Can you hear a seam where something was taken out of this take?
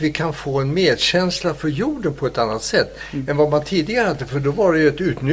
no; 0 cuts

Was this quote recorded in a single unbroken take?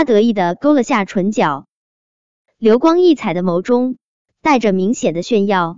yes; 0 cuts

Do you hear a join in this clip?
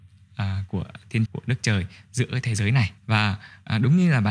yes; 2 cuts; at 1.3 s, 3.0 s

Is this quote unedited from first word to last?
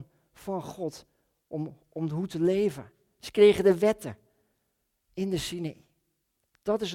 yes; 0 cuts

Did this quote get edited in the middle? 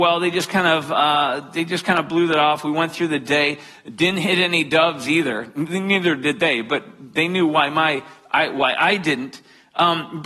no; 0 cuts

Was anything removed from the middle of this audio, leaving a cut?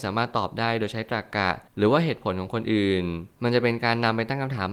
yes; 2 cuts; at 1.7 s, 3.3 s

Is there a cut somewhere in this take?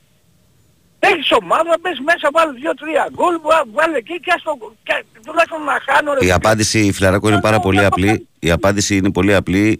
no; 0 cuts

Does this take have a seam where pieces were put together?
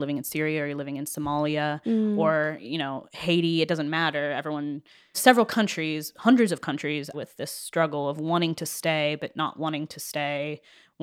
yes; 2 cuts; at 5.1 s, 7.1 s

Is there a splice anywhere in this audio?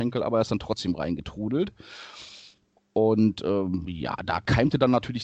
no; 0 cuts

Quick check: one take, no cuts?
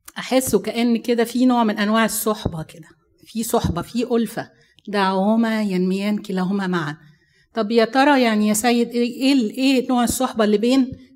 yes; 0 cuts

